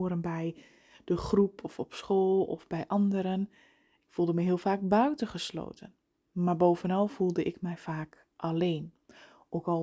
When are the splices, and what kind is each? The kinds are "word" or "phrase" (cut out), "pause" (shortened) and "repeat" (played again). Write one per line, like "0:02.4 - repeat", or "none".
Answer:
none